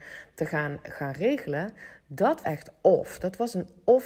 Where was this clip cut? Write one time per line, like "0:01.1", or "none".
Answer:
0:02.4